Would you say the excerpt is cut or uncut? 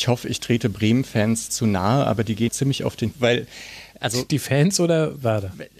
cut